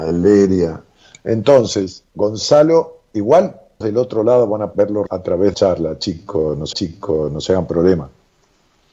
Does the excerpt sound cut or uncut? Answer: cut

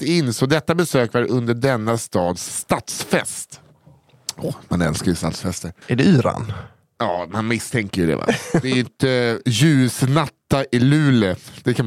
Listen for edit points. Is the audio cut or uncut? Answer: cut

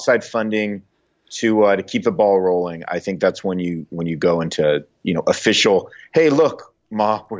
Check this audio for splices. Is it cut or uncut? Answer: uncut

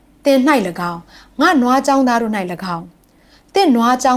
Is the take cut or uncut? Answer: uncut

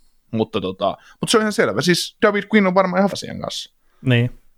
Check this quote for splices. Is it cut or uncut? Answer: cut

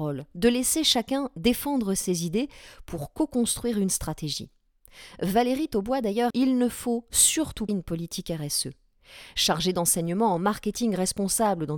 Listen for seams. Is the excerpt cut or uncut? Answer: cut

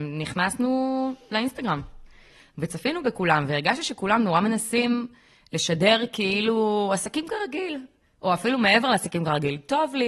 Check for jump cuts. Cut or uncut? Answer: uncut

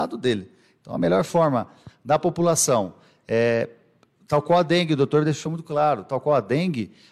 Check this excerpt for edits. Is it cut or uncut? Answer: uncut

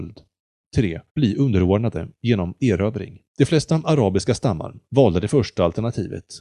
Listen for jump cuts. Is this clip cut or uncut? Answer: cut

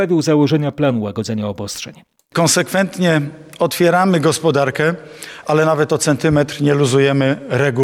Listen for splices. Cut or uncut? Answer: uncut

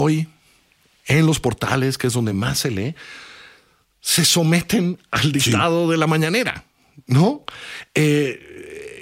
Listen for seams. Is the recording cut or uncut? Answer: uncut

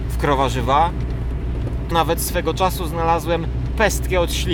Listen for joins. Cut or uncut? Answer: cut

